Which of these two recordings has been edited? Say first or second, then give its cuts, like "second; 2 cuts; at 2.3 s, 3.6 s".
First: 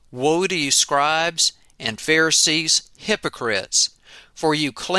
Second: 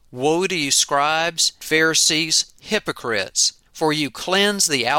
second; 2 cuts; at 1.6 s, 3.7 s